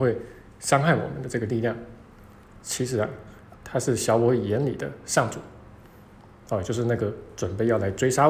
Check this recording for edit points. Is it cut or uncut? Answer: uncut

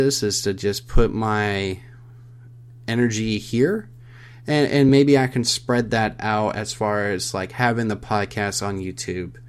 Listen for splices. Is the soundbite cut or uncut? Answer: uncut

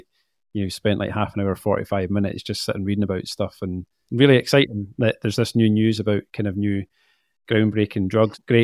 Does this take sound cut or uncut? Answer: uncut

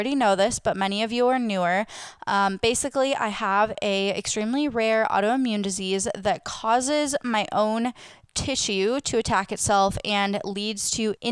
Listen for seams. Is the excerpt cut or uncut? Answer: uncut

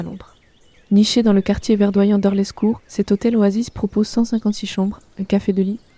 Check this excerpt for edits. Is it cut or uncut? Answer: cut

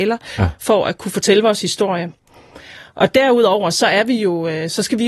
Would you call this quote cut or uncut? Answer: uncut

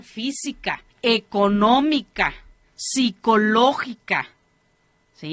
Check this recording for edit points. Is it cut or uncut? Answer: cut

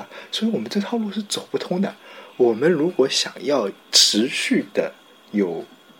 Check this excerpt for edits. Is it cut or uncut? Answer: cut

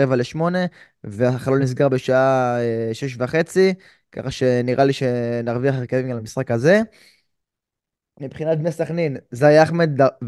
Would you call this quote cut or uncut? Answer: uncut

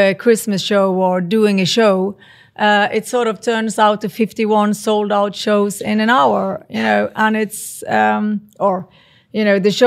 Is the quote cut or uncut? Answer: uncut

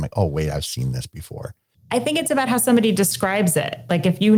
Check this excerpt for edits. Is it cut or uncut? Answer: uncut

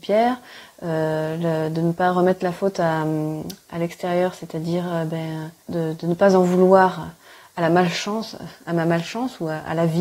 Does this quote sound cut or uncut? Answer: cut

